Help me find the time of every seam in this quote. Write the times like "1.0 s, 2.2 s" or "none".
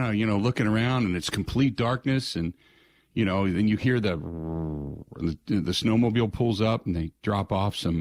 none